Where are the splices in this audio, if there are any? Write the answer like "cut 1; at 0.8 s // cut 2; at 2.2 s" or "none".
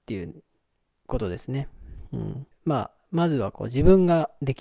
cut 1; at 2.5 s